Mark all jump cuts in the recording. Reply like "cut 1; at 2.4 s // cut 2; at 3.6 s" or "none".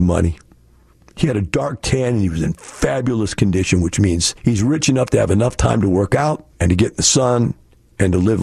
cut 1; at 6.5 s